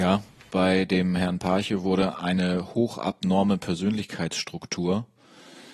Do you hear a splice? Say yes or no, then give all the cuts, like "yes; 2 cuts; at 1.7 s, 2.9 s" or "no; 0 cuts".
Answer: no; 0 cuts